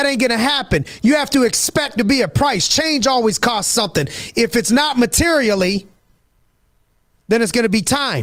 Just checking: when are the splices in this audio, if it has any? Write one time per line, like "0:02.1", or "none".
0:02.0